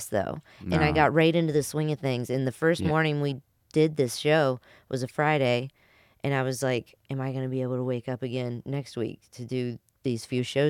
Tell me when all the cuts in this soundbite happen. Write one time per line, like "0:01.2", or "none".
none